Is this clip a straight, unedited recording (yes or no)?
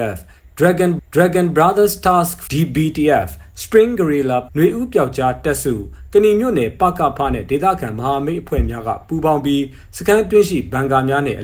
no